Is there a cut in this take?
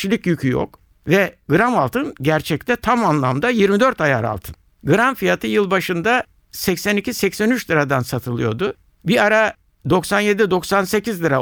no; 0 cuts

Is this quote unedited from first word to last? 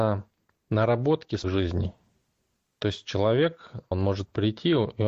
no; 2 cuts; at 1.4 s, 3.9 s

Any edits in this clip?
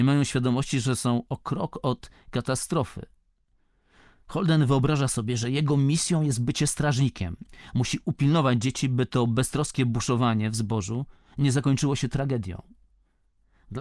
no; 0 cuts

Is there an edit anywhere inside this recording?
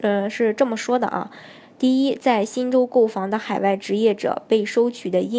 no; 0 cuts

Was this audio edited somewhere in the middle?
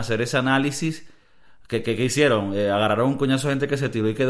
no; 0 cuts

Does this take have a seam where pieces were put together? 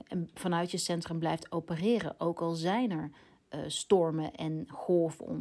no; 0 cuts

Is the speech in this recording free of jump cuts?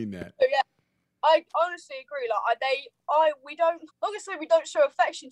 no; 2 cuts; at 1.5 s, 3.9 s

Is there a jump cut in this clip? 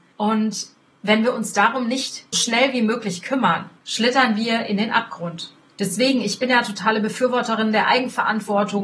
yes; 1 cut; at 2.3 s

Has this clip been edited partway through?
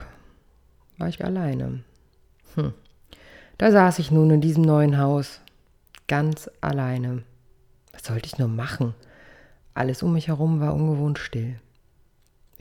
yes; 1 cut; at 1.2 s

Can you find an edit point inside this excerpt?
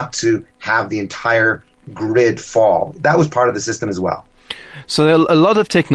no; 0 cuts

